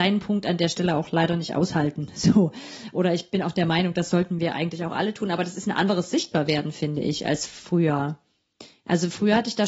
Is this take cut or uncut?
uncut